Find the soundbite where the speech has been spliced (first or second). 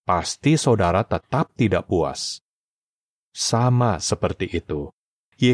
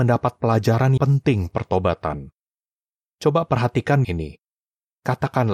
second